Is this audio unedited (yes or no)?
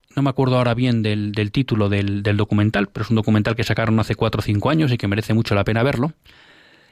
yes